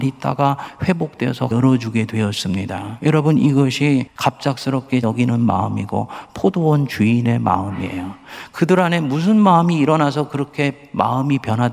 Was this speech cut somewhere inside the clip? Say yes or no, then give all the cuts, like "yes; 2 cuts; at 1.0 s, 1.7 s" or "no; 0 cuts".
yes; 2 cuts; at 1.5 s, 5.0 s